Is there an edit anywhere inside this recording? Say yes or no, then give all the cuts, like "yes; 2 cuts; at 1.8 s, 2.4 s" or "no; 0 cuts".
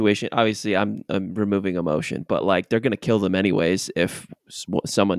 no; 0 cuts